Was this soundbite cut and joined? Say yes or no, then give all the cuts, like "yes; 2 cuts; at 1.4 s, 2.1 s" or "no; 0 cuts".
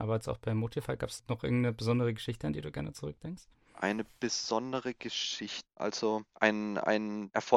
no; 0 cuts